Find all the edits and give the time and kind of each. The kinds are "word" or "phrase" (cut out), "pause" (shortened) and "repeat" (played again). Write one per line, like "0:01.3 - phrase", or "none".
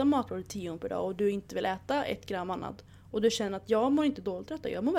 none